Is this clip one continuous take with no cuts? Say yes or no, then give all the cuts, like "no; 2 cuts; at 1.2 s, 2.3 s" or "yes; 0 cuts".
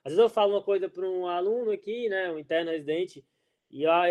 yes; 0 cuts